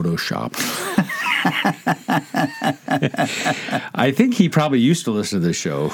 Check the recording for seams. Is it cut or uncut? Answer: uncut